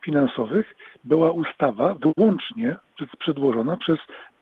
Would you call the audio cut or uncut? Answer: uncut